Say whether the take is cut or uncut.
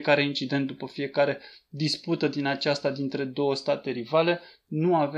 uncut